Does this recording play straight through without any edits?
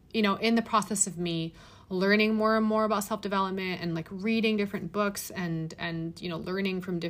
yes; 0 cuts

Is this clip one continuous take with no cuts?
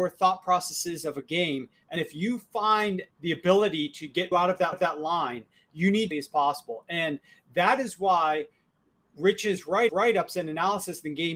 no; 6 cuts; at 2.0 s, 3.1 s, 4.3 s, 4.7 s, 6.1 s, 9.9 s

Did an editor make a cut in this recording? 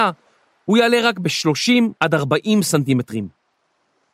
yes; 1 cut; at 2.0 s

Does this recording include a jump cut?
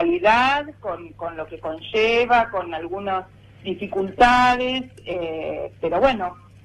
no; 0 cuts

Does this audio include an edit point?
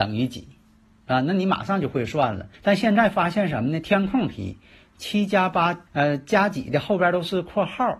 yes; 2 cuts; at 2.5 s, 5.9 s

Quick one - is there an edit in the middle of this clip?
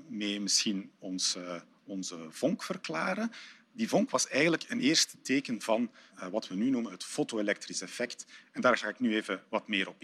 no; 0 cuts

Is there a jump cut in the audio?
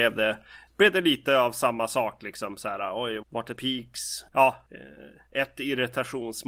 yes; 2 cuts; at 3.2 s, 3.6 s

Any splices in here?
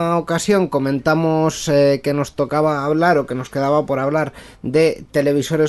no; 0 cuts

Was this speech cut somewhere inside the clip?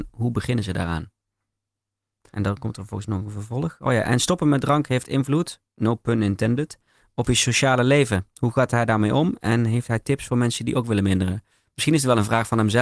no; 0 cuts

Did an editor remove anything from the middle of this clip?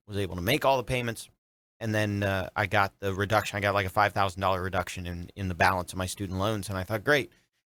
no; 0 cuts

